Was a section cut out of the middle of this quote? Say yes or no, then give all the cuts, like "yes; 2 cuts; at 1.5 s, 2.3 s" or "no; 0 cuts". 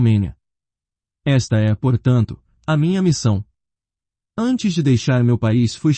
no; 0 cuts